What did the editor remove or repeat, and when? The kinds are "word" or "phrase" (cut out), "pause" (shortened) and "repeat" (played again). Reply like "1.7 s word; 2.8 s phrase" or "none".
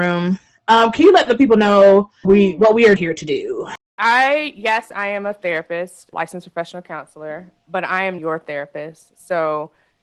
2.2 s word; 3.0 s word; 6.1 s word; 7.6 s word; 8.2 s word